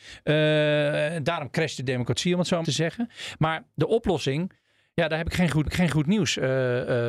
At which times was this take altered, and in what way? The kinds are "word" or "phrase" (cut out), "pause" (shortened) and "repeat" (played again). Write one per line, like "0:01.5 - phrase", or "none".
0:02.6 - phrase
0:05.6 - repeat